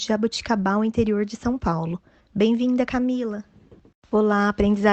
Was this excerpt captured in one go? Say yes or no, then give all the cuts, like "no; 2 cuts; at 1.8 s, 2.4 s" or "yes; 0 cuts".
yes; 0 cuts